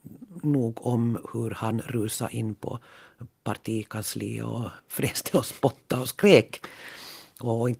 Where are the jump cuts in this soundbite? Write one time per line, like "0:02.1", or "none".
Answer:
0:04.8

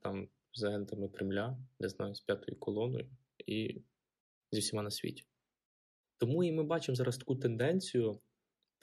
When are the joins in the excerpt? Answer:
none

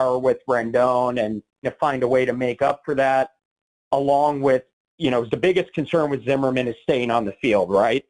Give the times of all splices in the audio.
0:01.6
0:05.3

